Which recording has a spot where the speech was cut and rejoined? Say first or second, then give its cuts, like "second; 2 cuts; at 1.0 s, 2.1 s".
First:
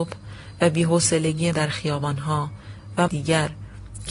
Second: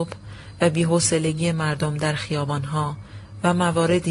first; 2 cuts; at 1.5 s, 3.1 s